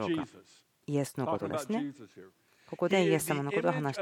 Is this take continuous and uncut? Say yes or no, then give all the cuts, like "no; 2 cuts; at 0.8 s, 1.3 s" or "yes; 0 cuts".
yes; 0 cuts